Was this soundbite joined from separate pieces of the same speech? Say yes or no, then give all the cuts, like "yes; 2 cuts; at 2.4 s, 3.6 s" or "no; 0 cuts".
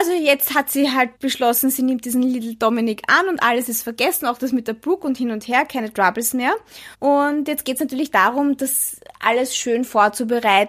yes; 2 cuts; at 1.2 s, 6.9 s